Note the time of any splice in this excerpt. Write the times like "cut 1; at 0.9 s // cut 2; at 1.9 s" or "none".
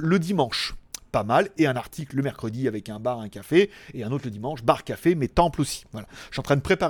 none